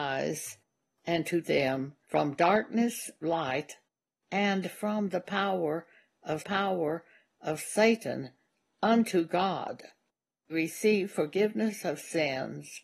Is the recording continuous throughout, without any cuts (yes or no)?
no